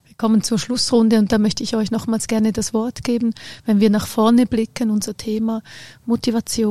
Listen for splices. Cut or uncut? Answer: uncut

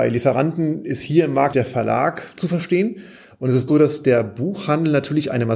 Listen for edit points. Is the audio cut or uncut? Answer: cut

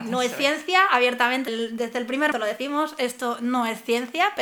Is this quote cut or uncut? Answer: cut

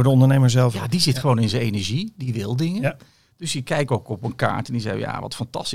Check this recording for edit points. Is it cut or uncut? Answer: cut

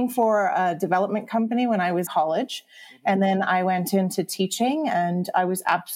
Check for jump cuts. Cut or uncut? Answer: cut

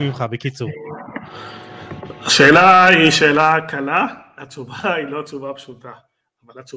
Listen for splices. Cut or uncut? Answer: uncut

